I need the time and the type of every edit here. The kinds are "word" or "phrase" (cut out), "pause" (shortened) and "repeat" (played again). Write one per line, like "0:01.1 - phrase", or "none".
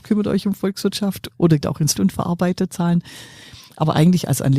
0:01.3 - word
0:01.6 - word
0:02.0 - word